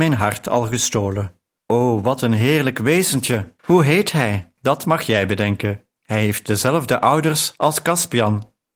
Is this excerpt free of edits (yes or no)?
no